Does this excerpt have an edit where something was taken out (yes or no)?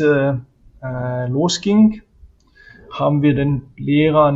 no